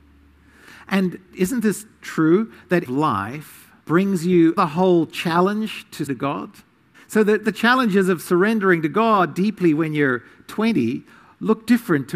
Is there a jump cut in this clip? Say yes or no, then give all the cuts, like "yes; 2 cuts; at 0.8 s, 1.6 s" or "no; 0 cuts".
yes; 6 cuts; at 1.3 s, 2.8 s, 3.8 s, 4.6 s, 6.1 s, 6.9 s